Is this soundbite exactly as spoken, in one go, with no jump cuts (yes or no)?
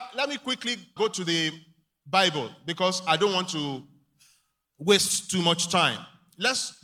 no